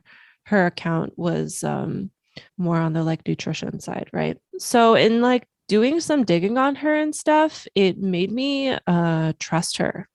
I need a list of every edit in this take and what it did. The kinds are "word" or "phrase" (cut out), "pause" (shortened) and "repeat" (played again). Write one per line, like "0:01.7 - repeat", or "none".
0:02.5 - pause
0:04.5 - pause